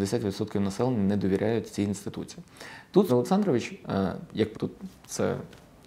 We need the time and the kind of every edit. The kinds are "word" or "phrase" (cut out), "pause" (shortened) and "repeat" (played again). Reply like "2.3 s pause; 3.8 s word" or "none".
3.1 s word; 4.5 s phrase